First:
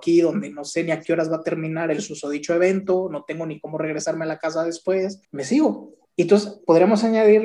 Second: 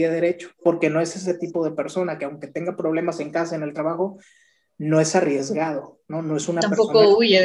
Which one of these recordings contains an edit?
first; 2 cuts; at 5.2 s, 6.0 s

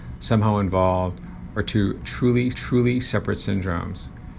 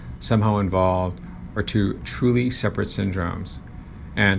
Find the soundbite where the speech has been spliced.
first; 1 cut; at 2.5 s

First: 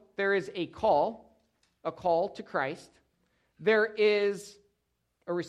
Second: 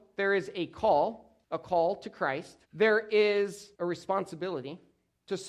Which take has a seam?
second; 3 cuts; at 1.4 s, 2.6 s, 3.7 s

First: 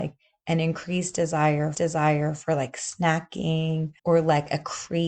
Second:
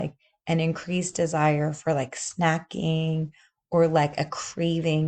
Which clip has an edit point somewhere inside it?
first; 2 cuts; at 1.7 s, 4.0 s

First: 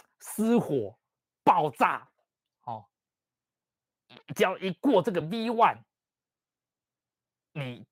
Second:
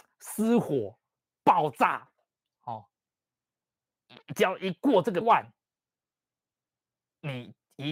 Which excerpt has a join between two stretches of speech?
second; 1 cut; at 5.2 s

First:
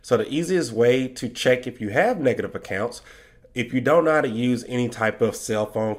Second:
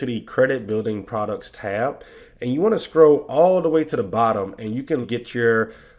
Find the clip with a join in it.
second; 1 cut; at 5.0 s

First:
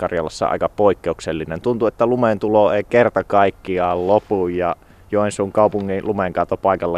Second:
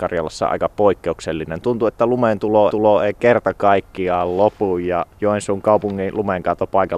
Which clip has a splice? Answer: second; 2 cuts; at 2.7 s, 5.1 s

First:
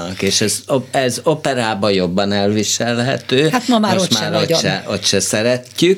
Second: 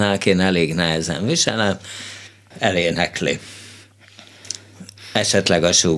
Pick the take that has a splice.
second; 1 cut; at 2.5 s

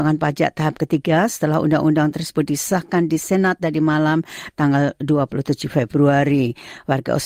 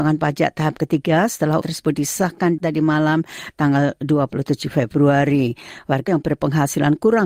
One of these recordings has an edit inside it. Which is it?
second; 3 cuts; at 1.6 s, 2.6 s, 6.1 s

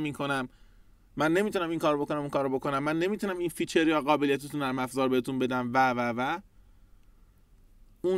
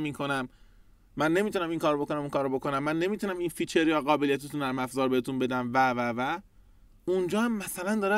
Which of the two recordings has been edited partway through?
second; 1 cut; at 6.8 s

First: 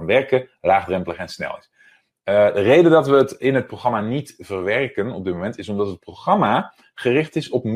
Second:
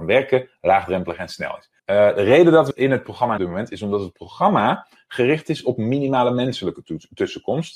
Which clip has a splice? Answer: second; 3 cuts; at 1.8 s, 2.7 s, 3.4 s

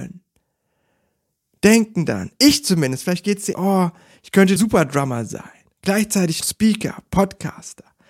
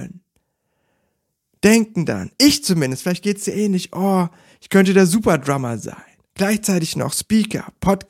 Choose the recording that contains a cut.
first; 3 cuts; at 3.5 s, 4.6 s, 6.4 s

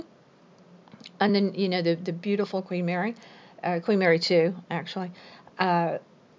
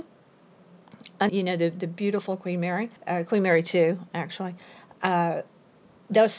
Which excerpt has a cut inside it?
second; 2 cuts; at 1.3 s, 3.0 s

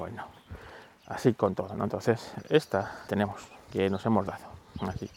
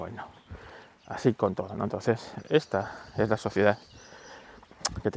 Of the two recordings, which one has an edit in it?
first; 2 cuts; at 3.1 s, 3.7 s

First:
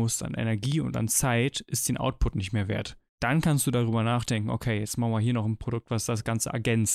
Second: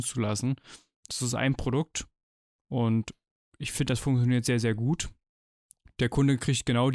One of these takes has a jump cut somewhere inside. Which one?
first; 1 cut; at 3.1 s

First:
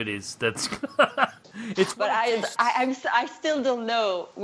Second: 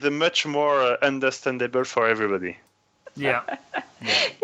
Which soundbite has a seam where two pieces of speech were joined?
first; 1 cut; at 2.6 s

